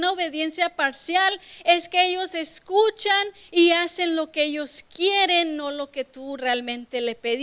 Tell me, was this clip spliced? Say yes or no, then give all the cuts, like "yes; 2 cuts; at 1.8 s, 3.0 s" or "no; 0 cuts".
no; 0 cuts